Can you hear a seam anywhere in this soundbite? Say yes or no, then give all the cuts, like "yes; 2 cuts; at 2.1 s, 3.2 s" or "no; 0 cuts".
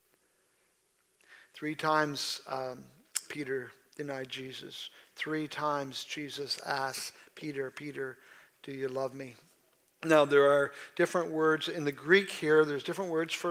no; 0 cuts